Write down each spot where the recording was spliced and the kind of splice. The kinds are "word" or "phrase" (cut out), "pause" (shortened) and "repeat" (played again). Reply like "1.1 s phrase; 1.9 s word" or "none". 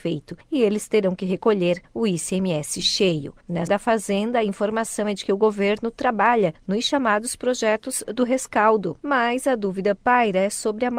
3.7 s word; 9.0 s pause